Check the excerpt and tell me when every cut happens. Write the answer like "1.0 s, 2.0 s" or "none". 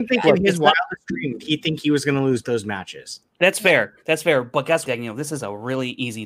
1.4 s, 2.4 s, 4.8 s

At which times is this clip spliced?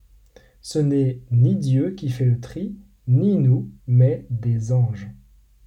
3.8 s

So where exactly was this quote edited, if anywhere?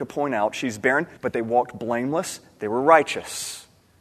1.2 s

